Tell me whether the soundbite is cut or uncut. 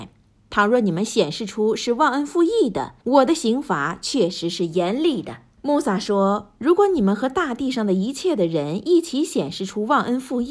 cut